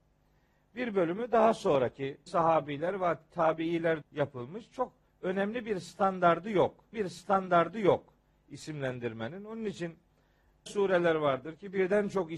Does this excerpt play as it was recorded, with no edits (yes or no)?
no